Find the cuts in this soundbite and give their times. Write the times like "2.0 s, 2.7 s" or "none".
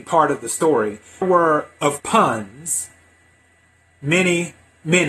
1.2 s, 2.0 s